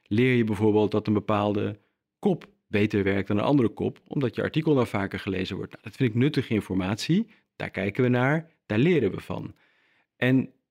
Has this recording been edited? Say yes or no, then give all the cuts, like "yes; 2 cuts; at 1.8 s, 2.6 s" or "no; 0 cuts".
no; 0 cuts